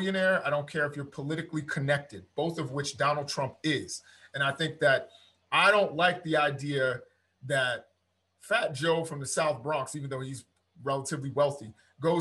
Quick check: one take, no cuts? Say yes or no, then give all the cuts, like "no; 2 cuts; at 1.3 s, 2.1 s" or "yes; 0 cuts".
yes; 0 cuts